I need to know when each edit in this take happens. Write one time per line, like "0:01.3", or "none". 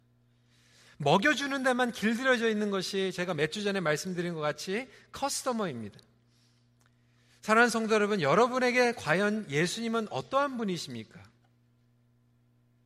none